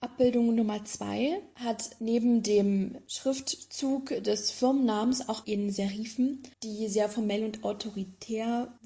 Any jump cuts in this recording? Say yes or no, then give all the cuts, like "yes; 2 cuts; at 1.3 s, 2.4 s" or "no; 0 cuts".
yes; 2 cuts; at 5.4 s, 6.5 s